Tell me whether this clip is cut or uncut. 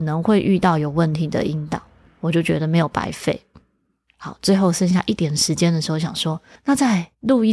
uncut